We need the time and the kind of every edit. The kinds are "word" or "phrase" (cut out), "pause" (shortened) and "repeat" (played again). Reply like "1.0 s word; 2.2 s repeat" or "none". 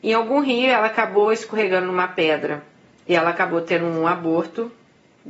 none